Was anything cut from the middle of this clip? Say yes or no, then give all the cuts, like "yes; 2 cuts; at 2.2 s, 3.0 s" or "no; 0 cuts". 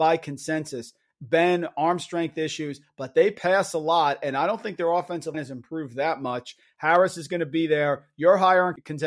yes; 1 cut; at 5.3 s